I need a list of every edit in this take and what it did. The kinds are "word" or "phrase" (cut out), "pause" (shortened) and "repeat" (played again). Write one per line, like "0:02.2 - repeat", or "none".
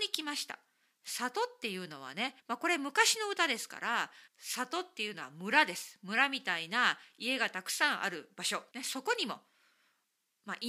0:02.4 - pause
0:04.3 - pause
0:08.7 - pause

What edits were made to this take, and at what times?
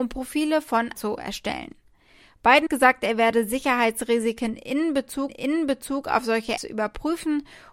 0:00.9 - word
0:02.7 - word
0:05.3 - repeat
0:06.6 - word

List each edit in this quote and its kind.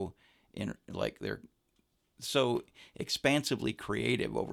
none

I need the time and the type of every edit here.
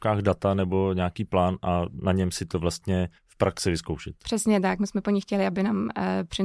0:03.2 - pause

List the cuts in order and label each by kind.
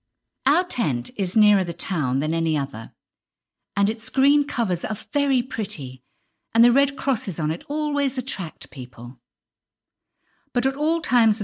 none

